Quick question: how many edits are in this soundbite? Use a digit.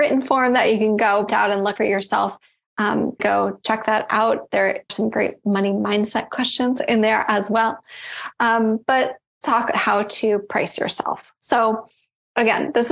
6